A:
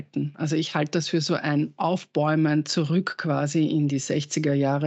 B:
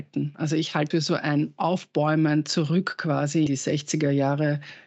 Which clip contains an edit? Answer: B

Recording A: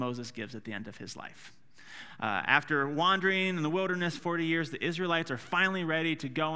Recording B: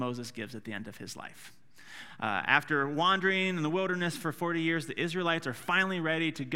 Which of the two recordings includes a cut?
A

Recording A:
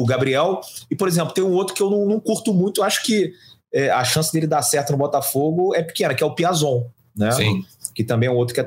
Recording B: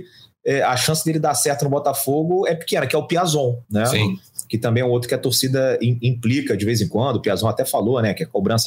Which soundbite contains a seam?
B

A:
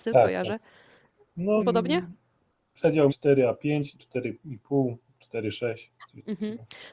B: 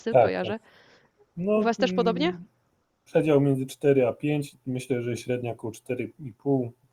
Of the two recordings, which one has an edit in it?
A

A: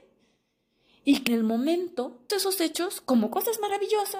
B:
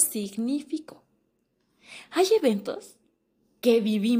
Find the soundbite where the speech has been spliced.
A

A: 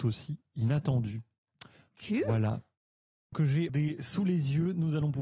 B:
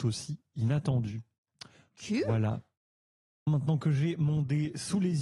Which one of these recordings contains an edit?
A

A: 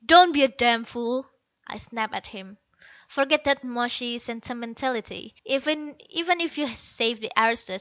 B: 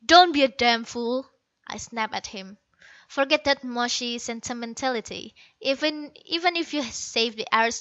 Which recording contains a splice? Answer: A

